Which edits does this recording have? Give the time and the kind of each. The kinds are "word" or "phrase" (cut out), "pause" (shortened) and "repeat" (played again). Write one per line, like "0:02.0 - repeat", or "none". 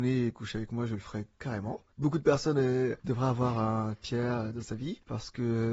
none